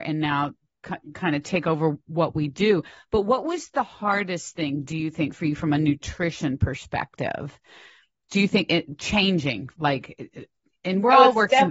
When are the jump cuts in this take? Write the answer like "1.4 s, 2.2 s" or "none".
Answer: none